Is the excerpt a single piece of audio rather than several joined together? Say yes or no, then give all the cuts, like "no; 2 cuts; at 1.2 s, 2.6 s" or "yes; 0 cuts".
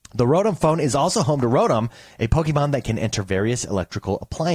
yes; 0 cuts